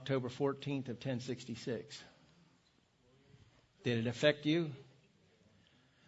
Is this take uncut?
yes; 0 cuts

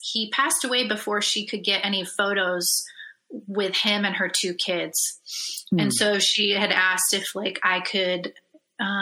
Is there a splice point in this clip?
no; 0 cuts

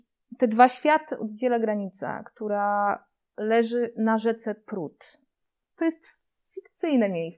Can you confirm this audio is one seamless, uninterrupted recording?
yes; 0 cuts

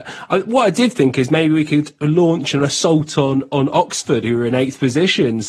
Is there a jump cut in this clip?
no; 0 cuts

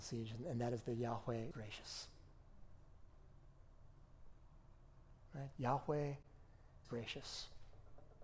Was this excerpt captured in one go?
no; 2 cuts; at 1.5 s, 6.8 s

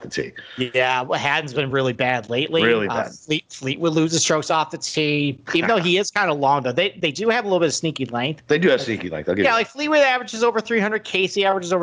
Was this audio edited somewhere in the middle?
no; 0 cuts

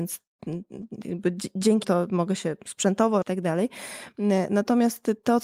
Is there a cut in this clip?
yes; 2 cuts; at 1.8 s, 3.2 s

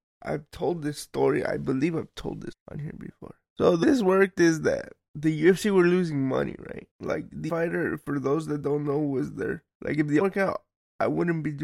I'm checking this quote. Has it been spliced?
yes; 5 cuts; at 2.5 s, 3.8 s, 6.9 s, 7.5 s, 10.2 s

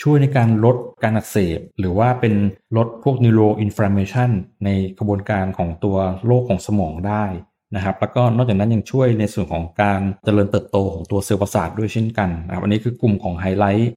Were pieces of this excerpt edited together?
yes; 1 cut; at 1.7 s

